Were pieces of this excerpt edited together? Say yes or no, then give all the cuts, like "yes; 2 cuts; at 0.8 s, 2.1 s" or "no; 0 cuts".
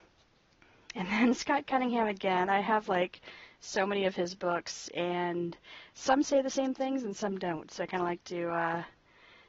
no; 0 cuts